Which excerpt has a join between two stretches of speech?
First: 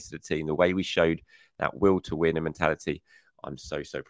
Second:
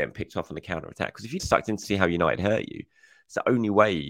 second; 2 cuts; at 1.4 s, 1.8 s

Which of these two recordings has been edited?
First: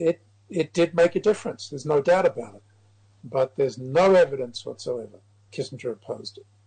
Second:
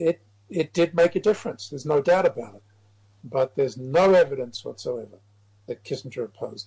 first; 1 cut; at 5.5 s

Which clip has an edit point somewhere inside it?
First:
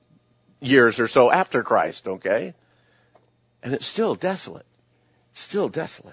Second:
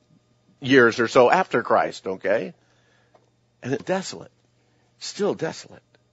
second; 1 cut; at 3.8 s

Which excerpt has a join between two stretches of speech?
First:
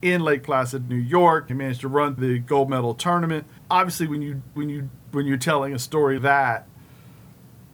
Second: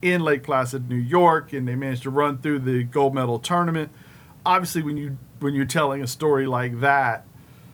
first; 5 cuts; at 1.5 s, 2.2 s, 3.6 s, 4.6 s, 6.2 s

